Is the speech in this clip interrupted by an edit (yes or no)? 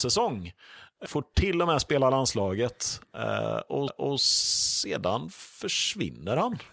yes